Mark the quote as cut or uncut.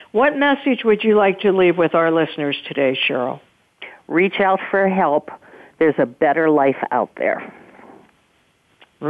uncut